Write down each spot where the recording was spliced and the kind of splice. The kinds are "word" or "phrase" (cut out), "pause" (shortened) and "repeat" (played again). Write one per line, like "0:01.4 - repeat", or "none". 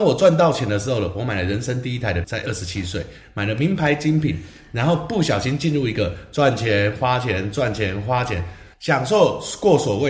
0:02.2 - word